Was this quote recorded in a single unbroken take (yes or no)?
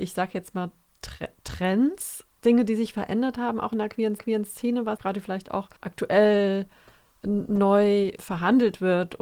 no